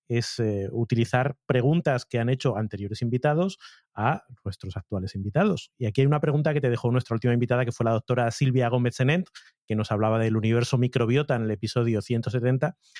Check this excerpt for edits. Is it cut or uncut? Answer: uncut